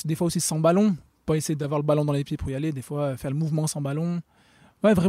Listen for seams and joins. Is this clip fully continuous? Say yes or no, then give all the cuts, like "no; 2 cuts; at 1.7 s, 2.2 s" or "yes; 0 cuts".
yes; 0 cuts